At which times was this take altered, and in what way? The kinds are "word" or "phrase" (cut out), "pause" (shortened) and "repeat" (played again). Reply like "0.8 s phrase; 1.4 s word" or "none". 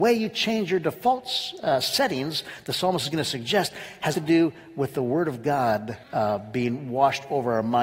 4.1 s phrase; 6.0 s pause